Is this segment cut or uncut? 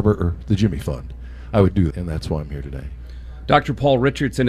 cut